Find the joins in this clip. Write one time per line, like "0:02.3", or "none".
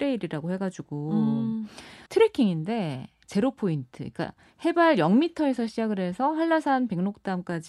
0:02.1